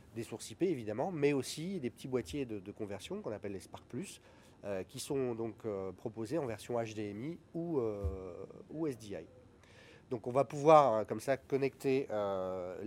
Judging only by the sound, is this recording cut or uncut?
uncut